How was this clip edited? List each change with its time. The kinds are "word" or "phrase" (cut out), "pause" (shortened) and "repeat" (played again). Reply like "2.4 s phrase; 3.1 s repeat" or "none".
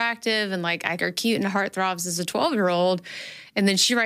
1.0 s word